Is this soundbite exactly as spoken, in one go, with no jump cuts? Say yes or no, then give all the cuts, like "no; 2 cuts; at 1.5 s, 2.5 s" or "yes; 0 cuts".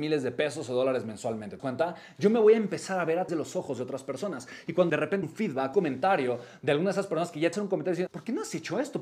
no; 7 cuts; at 1.6 s, 3.3 s, 4.9 s, 5.2 s, 5.7 s, 7.5 s, 8.1 s